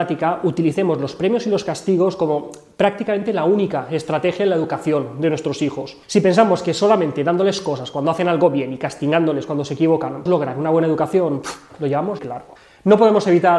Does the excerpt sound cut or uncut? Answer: cut